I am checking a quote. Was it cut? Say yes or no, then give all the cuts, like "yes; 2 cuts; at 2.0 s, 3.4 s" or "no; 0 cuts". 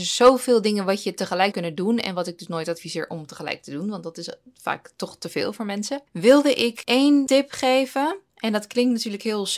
yes; 1 cut; at 1.5 s